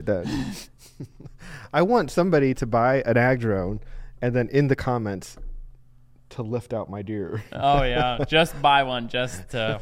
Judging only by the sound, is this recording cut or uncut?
uncut